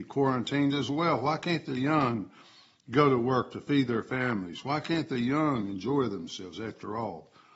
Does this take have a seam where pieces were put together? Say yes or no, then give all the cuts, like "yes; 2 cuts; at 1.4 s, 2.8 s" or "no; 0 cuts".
no; 0 cuts